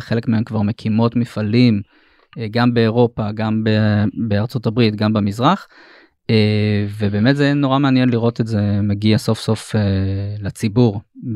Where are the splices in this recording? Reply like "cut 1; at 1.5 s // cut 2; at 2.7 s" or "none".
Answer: none